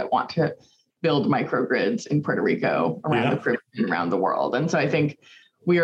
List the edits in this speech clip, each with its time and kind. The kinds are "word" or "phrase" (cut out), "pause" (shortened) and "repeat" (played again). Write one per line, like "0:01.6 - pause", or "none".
none